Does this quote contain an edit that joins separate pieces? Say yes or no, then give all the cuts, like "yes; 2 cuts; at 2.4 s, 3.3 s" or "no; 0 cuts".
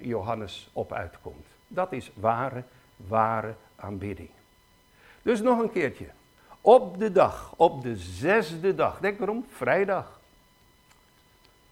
no; 0 cuts